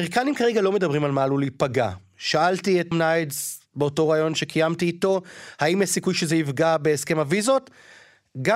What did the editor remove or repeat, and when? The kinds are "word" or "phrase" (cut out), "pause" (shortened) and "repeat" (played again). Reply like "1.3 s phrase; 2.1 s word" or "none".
2.9 s word